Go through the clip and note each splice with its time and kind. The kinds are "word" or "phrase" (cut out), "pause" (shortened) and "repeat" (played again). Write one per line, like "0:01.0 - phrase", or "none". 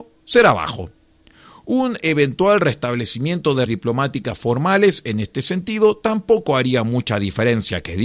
0:03.7 - word